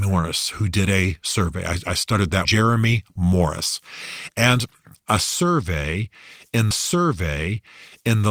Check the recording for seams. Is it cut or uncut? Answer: cut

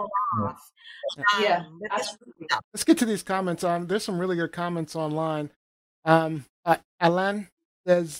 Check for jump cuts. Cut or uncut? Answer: cut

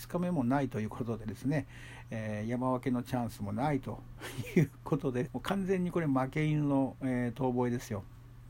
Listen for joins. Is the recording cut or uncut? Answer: cut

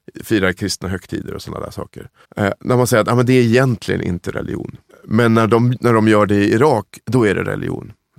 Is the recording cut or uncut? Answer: cut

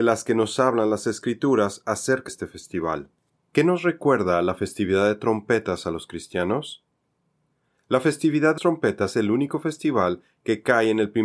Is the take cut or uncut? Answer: cut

